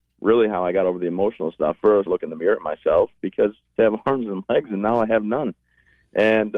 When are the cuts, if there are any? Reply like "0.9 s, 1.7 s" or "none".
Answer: 2.1 s, 3.8 s